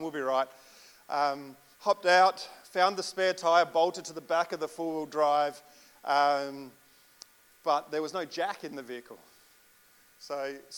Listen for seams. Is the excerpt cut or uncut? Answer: cut